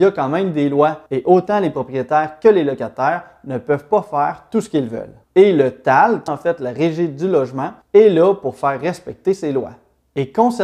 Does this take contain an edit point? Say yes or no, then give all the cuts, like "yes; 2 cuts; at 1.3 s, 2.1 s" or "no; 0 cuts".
yes; 4 cuts; at 1.1 s, 5.2 s, 6.3 s, 7.8 s